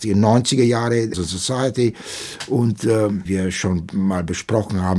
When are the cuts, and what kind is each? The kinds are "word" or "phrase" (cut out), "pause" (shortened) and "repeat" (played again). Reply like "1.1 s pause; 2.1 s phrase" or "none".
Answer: 1.1 s word; 3.3 s word